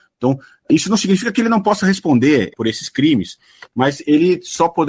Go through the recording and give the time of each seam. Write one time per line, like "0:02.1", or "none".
none